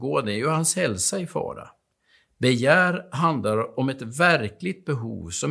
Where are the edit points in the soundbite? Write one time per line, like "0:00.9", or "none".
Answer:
none